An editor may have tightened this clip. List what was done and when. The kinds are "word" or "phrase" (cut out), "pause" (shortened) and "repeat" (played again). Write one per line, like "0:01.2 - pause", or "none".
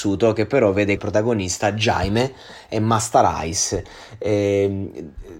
0:01.0 - word